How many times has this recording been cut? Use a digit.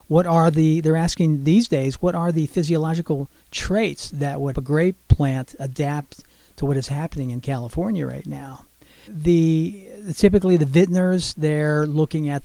2